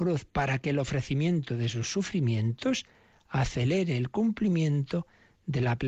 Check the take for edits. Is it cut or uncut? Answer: uncut